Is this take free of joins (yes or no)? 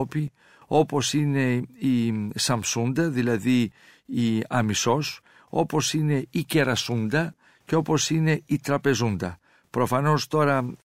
yes